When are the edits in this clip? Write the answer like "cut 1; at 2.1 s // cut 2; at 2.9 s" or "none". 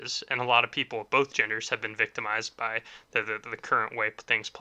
none